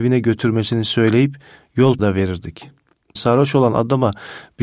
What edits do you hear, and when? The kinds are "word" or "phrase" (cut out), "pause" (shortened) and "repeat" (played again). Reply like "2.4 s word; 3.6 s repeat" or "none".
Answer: 2.0 s word; 3.2 s word